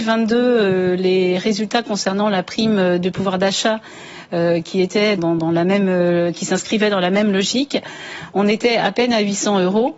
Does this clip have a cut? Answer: yes; 1 cut; at 5.2 s

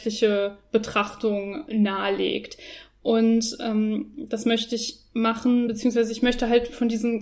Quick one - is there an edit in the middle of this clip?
no; 0 cuts

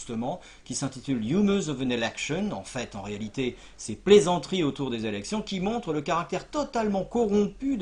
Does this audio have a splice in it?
no; 0 cuts

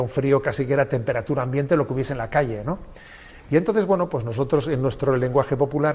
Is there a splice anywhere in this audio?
no; 0 cuts

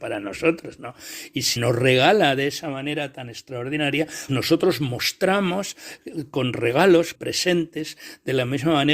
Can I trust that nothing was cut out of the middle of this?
no; 3 cuts; at 1.6 s, 4.3 s, 7.1 s

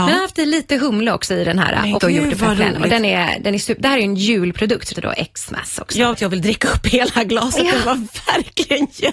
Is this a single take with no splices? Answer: no; 3 cuts; at 2.0 s, 4.9 s, 6.1 s

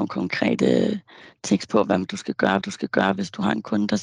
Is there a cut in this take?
yes; 1 cut; at 2.6 s

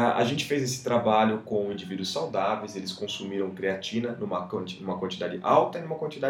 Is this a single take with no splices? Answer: yes; 0 cuts

